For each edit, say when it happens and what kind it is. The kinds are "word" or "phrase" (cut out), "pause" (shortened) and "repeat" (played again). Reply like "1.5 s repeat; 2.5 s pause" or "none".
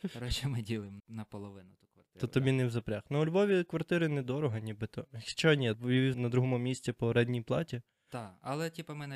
1.0 s word; 5.7 s word; 6.1 s phrase

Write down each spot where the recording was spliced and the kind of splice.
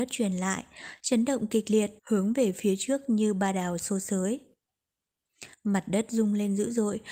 2.0 s pause

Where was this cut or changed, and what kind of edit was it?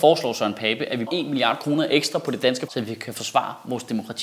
1.1 s word; 2.7 s word

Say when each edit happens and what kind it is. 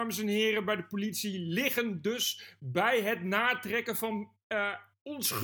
none

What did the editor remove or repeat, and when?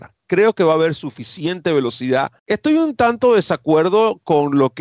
2.4 s pause

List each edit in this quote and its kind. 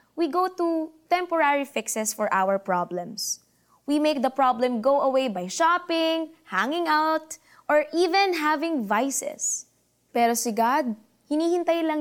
none

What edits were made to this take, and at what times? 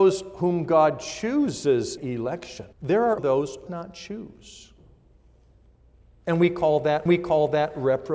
2.0 s word; 2.7 s pause; 3.2 s word; 3.7 s phrase; 7.1 s repeat

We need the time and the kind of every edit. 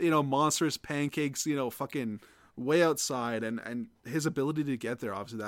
none

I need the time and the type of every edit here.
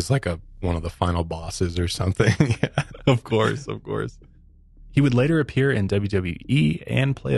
none

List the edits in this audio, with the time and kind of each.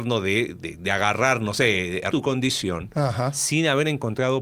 2.1 s word

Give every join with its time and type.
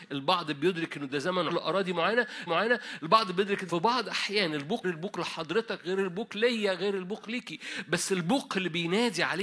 1.5 s word; 2.5 s repeat; 3.7 s phrase; 4.8 s phrase

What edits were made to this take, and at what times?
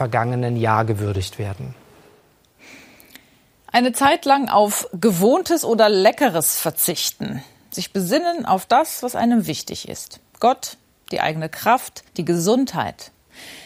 12.1 s pause

